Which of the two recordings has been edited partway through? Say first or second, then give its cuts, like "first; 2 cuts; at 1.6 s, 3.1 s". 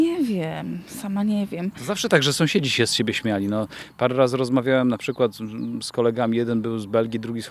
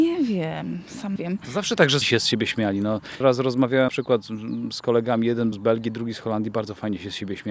second; 5 cuts; at 1.2 s, 2.0 s, 3.2 s, 3.9 s, 5.5 s